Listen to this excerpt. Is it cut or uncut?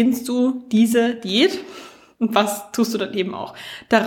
uncut